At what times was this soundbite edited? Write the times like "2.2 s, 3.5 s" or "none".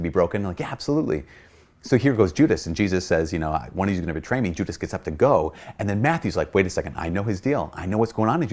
none